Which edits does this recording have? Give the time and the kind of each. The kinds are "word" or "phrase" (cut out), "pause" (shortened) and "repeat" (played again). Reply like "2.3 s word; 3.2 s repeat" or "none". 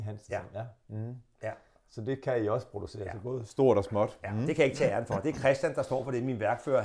none